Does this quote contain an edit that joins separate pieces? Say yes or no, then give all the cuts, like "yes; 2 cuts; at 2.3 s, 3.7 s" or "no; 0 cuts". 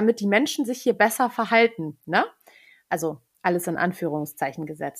no; 0 cuts